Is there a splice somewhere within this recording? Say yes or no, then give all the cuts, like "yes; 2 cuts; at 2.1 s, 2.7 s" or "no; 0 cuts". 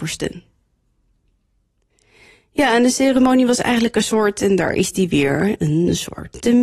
no; 0 cuts